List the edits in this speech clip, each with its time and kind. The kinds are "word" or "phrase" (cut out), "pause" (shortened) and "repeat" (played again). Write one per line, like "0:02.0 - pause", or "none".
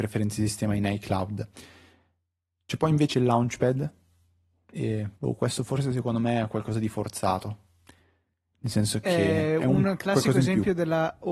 0:05.2 - pause